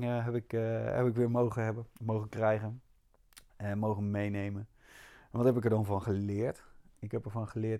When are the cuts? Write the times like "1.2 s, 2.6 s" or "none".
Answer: 1.9 s